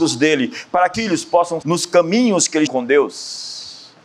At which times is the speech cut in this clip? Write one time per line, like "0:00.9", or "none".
0:00.9
0:01.6
0:02.7